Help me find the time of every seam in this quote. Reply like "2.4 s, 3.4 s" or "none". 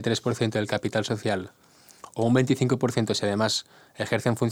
none